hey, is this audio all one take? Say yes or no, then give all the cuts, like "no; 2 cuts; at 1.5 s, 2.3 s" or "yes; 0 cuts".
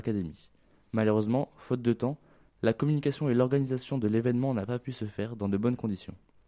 yes; 0 cuts